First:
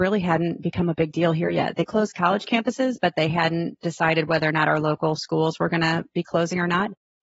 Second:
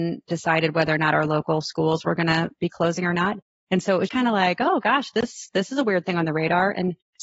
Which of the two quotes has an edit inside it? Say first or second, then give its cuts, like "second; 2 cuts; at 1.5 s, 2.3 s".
second; 1 cut; at 4.1 s